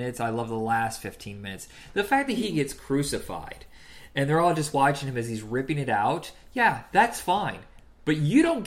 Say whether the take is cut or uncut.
uncut